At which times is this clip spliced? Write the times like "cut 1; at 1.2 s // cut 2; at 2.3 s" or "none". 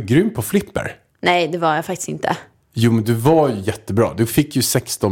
cut 1; at 1.1 s // cut 2; at 2.6 s